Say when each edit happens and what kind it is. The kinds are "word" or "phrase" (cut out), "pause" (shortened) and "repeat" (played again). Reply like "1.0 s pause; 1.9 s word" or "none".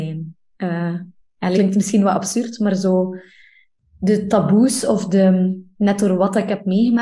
1.5 s word